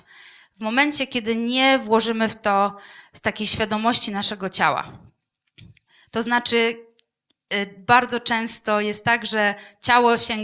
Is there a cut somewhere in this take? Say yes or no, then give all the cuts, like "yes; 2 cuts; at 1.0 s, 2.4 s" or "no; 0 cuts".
no; 0 cuts